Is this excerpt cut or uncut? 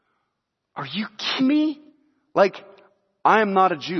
cut